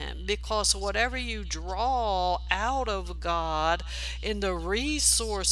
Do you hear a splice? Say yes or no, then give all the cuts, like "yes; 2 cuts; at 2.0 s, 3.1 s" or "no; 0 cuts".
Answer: no; 0 cuts